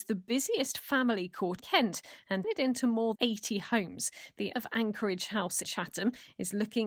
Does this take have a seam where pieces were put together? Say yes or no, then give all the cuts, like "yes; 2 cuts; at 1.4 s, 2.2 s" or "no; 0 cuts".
yes; 5 cuts; at 1.6 s, 2.4 s, 3.2 s, 4.5 s, 5.6 s